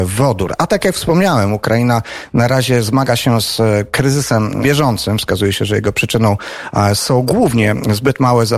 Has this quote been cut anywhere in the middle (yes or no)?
yes